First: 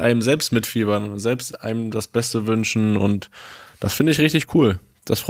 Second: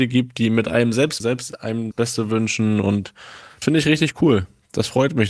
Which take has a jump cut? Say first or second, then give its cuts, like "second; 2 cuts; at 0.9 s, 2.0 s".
second; 3 cuts; at 1.2 s, 1.9 s, 3.6 s